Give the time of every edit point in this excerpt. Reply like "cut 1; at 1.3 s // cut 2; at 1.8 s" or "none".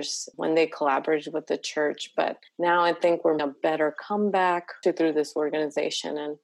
cut 1; at 2.5 s // cut 2; at 3.4 s // cut 3; at 4.8 s